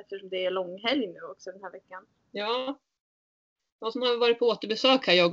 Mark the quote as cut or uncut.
uncut